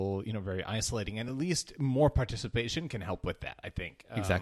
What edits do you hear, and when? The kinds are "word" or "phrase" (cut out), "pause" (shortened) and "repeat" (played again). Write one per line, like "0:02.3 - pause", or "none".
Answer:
none